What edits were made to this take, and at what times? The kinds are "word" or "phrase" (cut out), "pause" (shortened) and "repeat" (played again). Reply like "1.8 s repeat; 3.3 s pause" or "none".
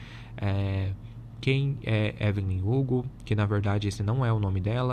none